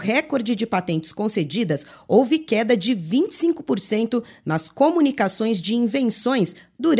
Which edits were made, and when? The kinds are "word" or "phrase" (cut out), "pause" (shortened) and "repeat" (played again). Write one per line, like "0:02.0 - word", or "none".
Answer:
none